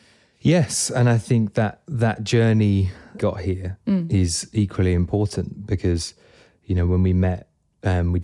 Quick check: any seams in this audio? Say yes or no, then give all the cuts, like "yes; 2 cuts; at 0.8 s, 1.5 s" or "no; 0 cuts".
yes; 2 cuts; at 3.2 s, 3.8 s